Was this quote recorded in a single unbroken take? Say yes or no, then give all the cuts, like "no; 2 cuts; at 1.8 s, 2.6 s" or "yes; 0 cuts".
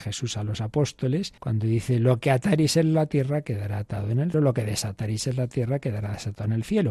no; 2 cuts; at 1.4 s, 4.3 s